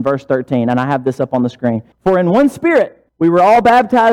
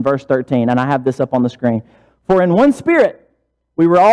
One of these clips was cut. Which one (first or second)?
first